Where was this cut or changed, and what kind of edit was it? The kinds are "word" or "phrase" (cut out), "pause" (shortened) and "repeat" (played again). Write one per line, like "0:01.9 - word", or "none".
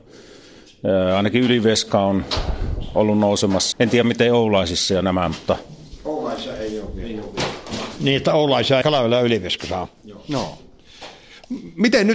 0:03.7 - word
0:08.8 - phrase